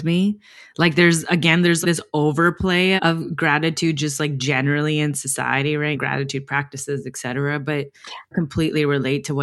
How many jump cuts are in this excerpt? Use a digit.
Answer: 4